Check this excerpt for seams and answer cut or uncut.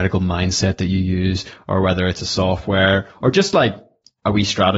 uncut